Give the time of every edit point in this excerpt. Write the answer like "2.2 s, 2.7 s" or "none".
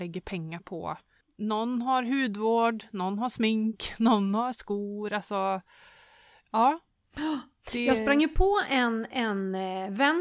none